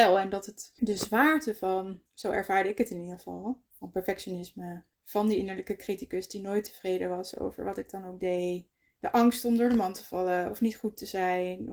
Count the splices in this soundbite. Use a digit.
2